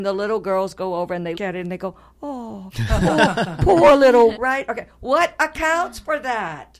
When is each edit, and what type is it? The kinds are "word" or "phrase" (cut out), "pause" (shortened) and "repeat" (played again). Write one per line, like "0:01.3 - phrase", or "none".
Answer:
0:01.3 - word
0:04.3 - word